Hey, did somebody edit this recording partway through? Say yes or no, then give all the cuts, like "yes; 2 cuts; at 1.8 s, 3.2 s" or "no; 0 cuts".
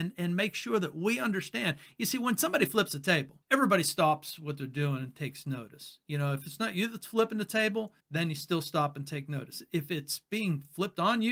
yes; 2 cuts; at 3.4 s, 8.0 s